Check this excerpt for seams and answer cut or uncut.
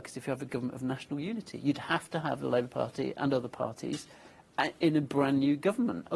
uncut